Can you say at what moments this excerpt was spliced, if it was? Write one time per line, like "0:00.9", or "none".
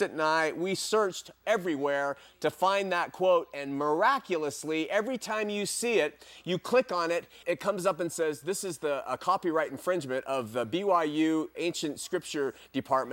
0:07.4
0:11.5